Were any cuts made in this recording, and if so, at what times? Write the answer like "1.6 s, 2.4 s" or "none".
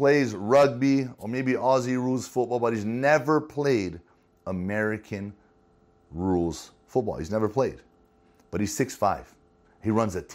none